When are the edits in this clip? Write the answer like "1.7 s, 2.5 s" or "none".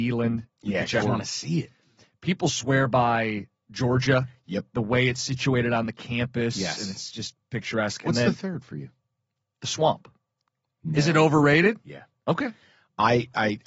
1.0 s